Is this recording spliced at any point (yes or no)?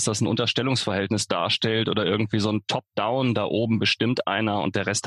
no